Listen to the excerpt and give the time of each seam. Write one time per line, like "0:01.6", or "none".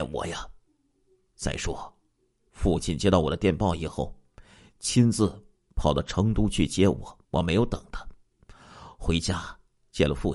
0:07.2